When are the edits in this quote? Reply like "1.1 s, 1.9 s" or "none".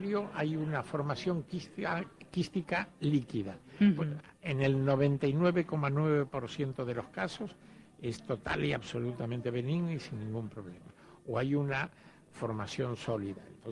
none